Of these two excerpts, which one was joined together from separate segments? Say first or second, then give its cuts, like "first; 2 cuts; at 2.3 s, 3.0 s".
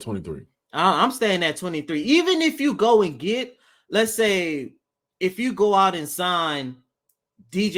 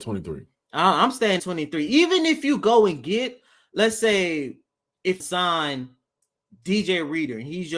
second; 2 cuts; at 1.4 s, 5.2 s